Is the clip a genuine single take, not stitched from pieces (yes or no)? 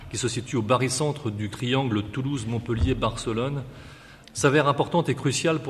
no